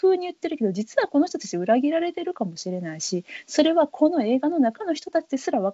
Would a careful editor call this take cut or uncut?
uncut